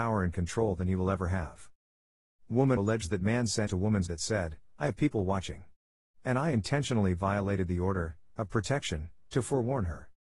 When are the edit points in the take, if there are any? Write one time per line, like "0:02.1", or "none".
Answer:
0:02.8
0:03.7
0:04.1